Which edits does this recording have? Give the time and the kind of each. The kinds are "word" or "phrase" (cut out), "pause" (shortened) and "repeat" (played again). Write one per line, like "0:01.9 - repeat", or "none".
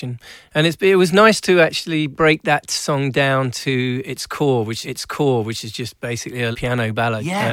0:04.8 - repeat
0:06.5 - word